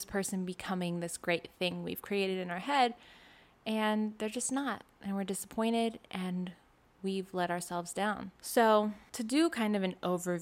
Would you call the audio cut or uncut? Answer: uncut